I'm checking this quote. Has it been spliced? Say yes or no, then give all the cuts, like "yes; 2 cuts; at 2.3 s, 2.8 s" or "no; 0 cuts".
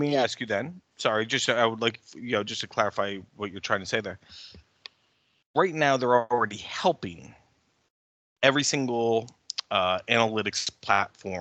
no; 0 cuts